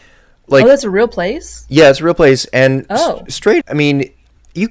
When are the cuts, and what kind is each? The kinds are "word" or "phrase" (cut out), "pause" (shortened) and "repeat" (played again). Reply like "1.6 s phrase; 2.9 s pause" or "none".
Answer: 3.6 s word